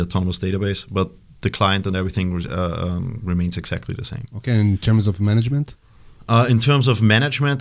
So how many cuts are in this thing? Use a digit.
0